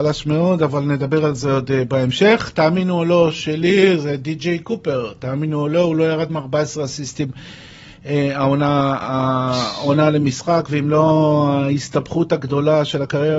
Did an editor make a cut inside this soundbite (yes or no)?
no